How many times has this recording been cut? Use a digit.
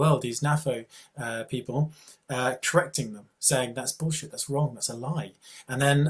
0